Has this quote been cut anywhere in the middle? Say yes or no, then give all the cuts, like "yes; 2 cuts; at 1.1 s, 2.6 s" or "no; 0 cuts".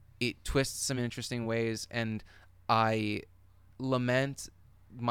no; 0 cuts